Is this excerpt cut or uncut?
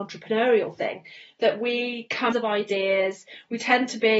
cut